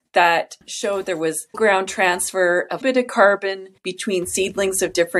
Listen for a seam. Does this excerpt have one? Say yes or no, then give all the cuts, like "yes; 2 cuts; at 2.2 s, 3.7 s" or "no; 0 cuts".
yes; 4 cuts; at 1.0 s, 1.5 s, 2.8 s, 3.8 s